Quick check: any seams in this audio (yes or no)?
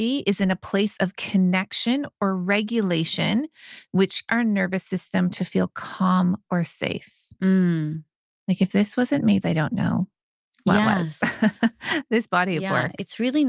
yes